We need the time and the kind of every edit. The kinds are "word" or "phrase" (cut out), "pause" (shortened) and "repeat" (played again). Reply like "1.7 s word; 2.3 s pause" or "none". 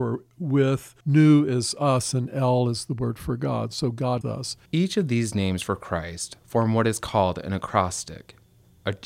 1.0 s pause; 4.2 s word; 4.7 s pause